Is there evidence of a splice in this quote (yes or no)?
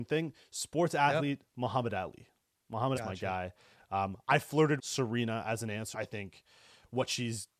yes